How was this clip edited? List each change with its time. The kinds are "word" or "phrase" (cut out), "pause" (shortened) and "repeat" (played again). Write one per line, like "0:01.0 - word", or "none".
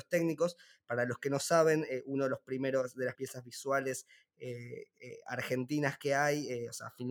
0:03.1 - word